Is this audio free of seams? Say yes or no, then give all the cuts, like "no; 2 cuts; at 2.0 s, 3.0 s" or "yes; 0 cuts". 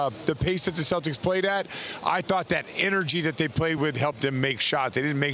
yes; 0 cuts